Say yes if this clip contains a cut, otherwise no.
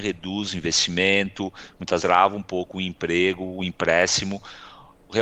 yes